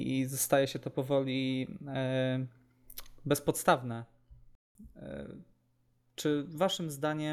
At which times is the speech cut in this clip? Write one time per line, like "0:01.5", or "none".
none